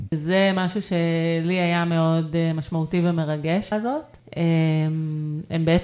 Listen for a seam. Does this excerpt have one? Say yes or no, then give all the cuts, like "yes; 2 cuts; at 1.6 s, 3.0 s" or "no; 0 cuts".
yes; 1 cut; at 3.7 s